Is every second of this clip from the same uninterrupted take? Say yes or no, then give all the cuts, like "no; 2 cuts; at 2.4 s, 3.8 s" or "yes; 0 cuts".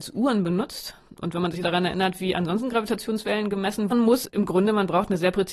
no; 4 cuts; at 1.1 s, 1.6 s, 3.9 s, 4.3 s